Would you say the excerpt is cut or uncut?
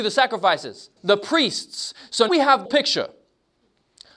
cut